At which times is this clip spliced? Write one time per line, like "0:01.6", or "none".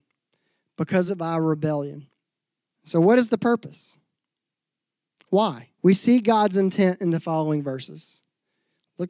0:01.1
0:02.5
0:05.7